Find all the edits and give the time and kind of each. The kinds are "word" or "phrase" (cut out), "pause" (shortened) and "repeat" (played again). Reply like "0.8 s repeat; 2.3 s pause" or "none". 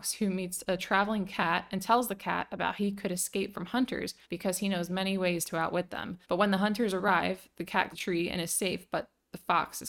4.2 s pause; 6.2 s pause; 7.9 s word